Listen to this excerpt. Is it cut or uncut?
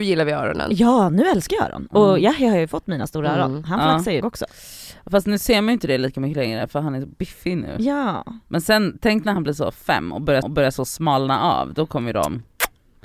cut